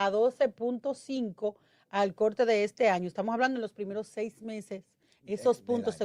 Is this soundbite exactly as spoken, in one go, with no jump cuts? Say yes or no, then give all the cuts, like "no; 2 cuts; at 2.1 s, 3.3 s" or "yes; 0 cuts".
yes; 0 cuts